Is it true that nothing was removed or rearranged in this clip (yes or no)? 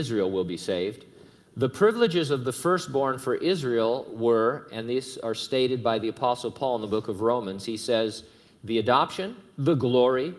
yes